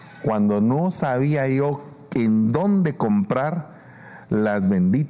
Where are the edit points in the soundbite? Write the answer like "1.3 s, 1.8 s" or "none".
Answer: none